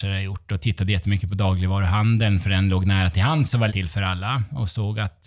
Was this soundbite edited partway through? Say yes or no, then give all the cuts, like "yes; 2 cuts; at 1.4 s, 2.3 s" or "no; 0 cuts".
yes; 1 cut; at 3.7 s